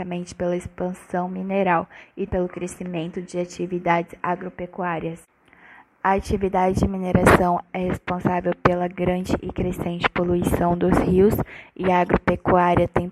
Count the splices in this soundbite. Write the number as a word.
one